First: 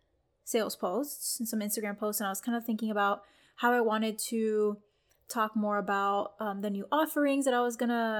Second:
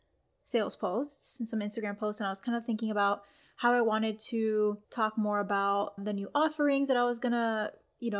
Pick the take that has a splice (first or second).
second